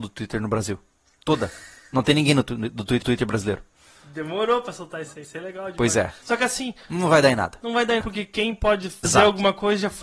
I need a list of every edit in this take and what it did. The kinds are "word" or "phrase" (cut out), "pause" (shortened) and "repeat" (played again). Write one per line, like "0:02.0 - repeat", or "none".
0:03.0 - repeat
0:05.2 - word
0:08.0 - word
0:09.0 - word